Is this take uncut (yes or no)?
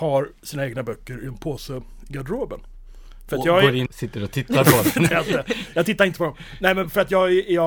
no